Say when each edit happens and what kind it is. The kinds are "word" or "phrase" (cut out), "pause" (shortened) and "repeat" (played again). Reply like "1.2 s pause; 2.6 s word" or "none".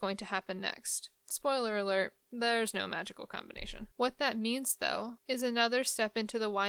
1.2 s pause; 2.2 s pause; 3.9 s pause; 5.2 s pause